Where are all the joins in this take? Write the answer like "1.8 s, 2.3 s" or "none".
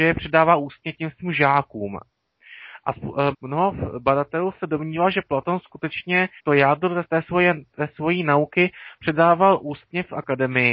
3.3 s, 6.4 s, 7.0 s